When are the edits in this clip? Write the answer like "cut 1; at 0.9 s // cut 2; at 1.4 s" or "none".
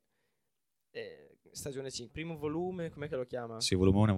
cut 1; at 2.1 s